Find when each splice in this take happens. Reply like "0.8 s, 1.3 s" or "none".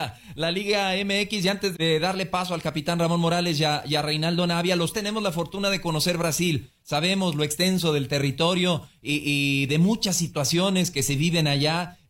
1.7 s, 4.9 s, 10.9 s